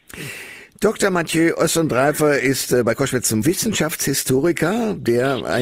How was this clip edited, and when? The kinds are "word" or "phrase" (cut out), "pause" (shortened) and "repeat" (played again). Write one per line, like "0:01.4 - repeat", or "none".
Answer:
0:03.4 - word